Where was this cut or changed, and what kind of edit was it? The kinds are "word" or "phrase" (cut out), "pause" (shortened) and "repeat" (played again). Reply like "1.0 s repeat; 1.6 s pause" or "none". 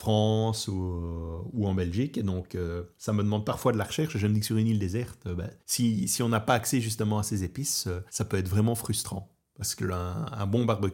2.9 s pause; 5.6 s pause; 8.1 s pause